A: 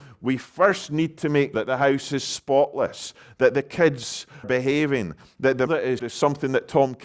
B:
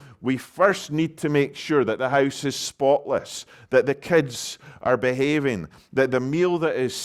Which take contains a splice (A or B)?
A